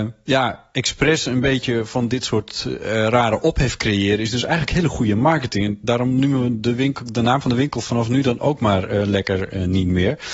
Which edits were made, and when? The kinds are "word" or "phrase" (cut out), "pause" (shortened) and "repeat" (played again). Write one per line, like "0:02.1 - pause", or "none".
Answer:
none

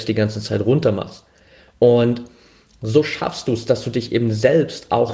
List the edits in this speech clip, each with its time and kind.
none

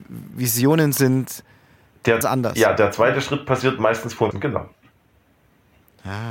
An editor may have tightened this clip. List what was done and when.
0:02.2 - word
0:04.3 - word

